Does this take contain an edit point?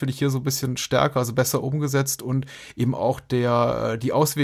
no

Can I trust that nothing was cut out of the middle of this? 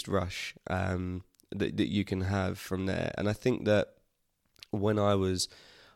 yes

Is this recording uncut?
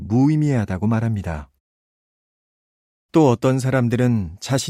yes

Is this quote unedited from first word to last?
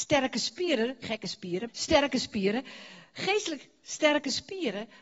no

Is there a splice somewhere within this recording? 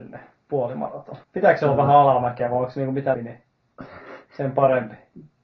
yes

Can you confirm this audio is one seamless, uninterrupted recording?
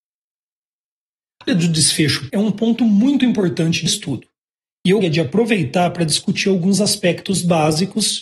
no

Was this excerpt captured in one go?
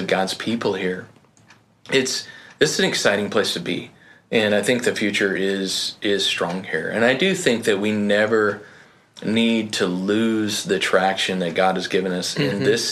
yes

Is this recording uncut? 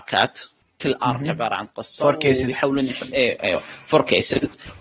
yes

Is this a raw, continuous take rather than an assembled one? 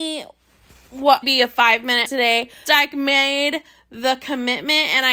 no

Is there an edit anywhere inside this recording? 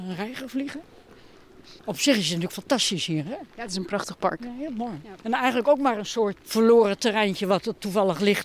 yes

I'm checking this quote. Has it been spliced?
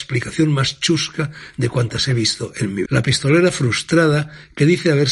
yes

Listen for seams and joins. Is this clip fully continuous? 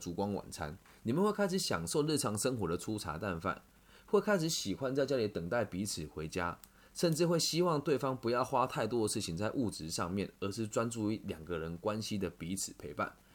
yes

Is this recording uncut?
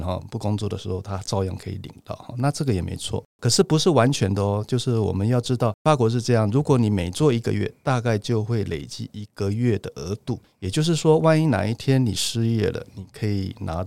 no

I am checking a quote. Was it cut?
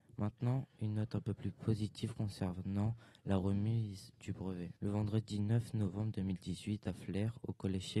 yes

